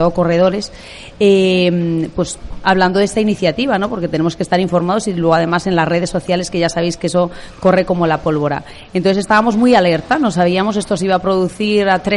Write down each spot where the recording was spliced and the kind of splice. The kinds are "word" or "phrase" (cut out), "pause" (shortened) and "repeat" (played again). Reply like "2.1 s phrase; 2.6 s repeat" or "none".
none